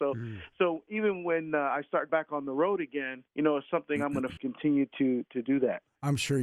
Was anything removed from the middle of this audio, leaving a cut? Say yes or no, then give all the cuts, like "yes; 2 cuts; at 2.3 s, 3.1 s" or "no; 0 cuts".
yes; 4 cuts; at 2.1 s, 3.3 s, 4.4 s, 5.2 s